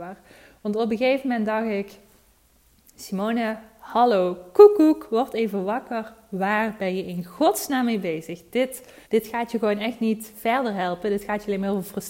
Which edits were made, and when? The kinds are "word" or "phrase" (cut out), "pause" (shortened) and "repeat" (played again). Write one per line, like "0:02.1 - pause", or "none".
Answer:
0:09.0 - pause

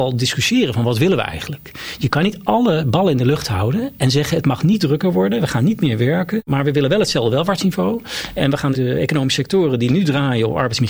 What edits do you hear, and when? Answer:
none

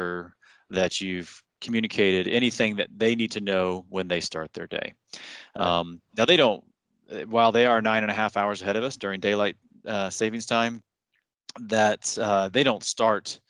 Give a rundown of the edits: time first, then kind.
none

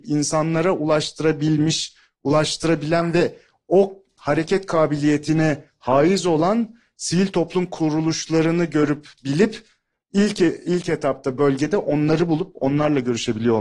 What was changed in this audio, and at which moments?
none

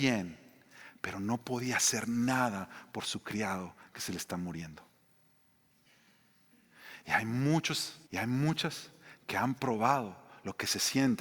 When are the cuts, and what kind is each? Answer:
0:08.1 - pause

